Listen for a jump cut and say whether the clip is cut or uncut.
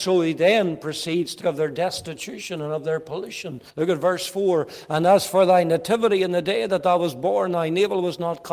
cut